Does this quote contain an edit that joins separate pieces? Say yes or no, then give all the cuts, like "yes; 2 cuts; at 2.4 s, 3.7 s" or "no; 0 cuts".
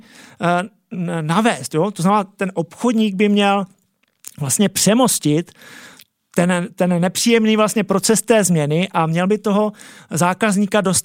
no; 0 cuts